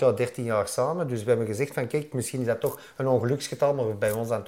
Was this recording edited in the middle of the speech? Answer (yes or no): no